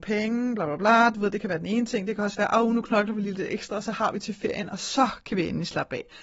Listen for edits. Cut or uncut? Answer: uncut